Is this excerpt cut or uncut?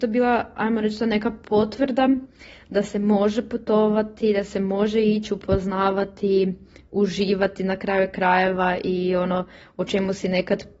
uncut